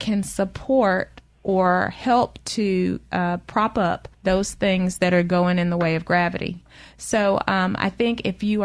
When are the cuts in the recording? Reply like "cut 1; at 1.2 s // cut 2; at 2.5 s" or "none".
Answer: cut 1; at 4.1 s